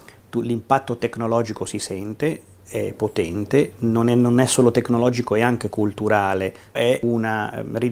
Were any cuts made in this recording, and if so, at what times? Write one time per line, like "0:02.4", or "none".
0:06.8